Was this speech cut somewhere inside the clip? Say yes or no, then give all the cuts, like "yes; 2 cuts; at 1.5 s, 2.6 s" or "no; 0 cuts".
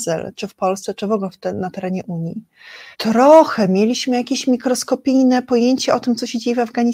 yes; 1 cut; at 2.9 s